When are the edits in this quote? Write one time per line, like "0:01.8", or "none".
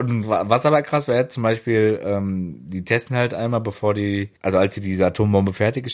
0:04.4

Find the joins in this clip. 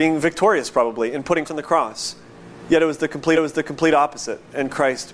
0:01.4
0:03.3

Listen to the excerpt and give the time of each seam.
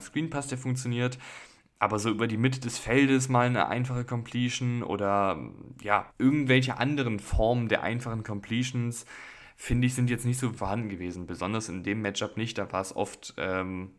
0:06.1
0:10.6

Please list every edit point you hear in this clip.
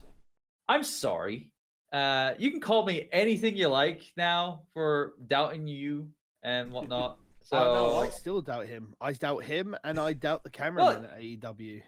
none

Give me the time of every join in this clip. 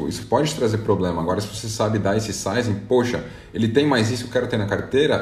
none

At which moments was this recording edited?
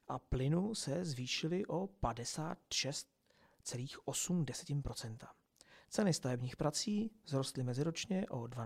none

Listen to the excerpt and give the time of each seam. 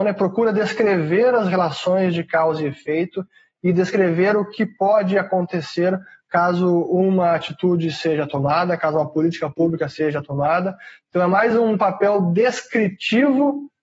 none

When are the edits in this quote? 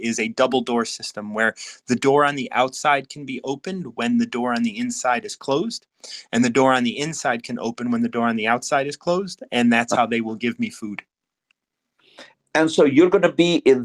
0:12.3

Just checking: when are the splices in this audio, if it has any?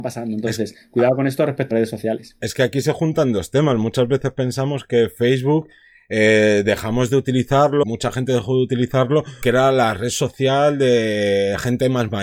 0:01.7
0:07.8
0:09.4

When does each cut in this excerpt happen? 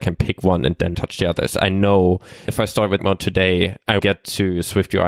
0:00.9
0:02.5
0:03.0
0:04.0

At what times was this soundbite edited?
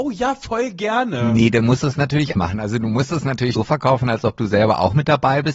0:02.3
0:03.5

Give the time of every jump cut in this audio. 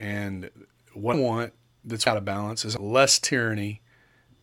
0:01.1
0:02.1
0:02.8

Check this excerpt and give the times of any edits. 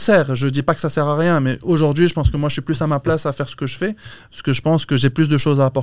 none

